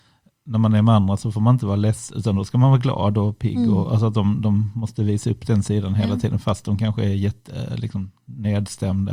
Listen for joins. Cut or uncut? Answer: uncut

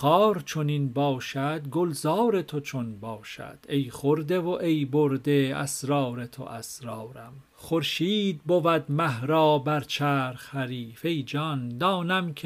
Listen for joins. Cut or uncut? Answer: cut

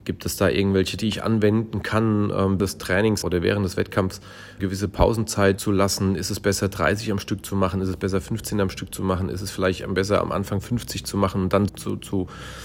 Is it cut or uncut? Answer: cut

